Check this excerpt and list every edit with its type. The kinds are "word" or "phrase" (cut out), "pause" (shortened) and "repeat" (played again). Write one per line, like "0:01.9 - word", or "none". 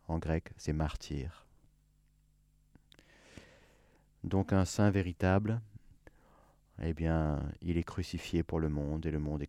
none